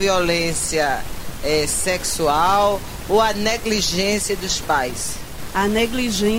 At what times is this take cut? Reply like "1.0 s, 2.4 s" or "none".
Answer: none

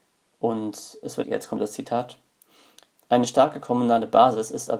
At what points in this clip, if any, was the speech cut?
1.2 s

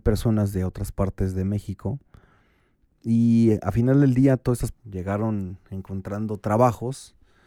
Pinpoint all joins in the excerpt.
4.7 s

